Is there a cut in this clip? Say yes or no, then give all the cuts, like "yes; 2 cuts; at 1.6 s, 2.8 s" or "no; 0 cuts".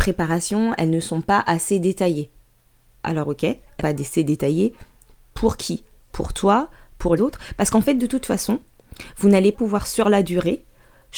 yes; 3 cuts; at 3.8 s, 7.2 s, 9.5 s